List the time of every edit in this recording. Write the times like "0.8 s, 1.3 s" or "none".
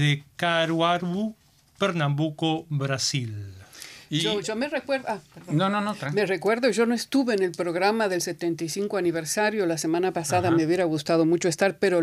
none